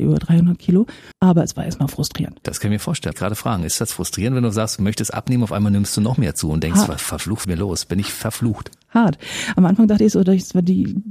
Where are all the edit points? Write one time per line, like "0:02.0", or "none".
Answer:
0:01.1
0:03.1
0:07.4